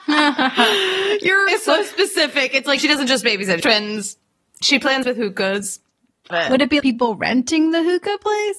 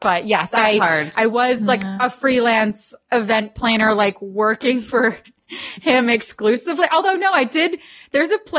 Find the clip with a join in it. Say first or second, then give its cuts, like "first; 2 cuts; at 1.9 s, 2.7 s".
first; 6 cuts; at 1.5 s, 2.8 s, 3.6 s, 5.0 s, 6.3 s, 6.8 s